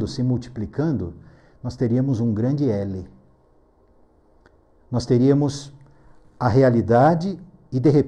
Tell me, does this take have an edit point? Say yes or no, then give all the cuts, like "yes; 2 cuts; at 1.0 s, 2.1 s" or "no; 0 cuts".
no; 0 cuts